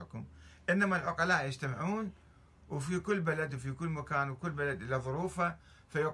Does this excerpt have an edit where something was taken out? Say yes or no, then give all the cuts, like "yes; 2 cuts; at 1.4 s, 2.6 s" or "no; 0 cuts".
no; 0 cuts